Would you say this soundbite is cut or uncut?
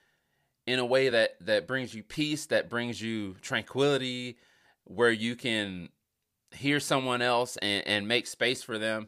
uncut